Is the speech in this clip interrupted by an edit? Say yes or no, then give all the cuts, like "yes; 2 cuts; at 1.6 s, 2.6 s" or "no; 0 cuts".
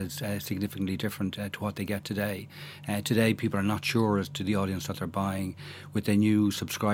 no; 0 cuts